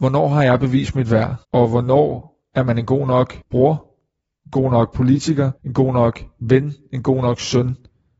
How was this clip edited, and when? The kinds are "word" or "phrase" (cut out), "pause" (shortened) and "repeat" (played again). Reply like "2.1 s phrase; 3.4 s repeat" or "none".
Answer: 1.4 s pause; 3.4 s pause; 5.6 s pause